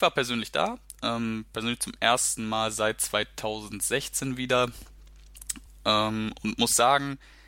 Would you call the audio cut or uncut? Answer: uncut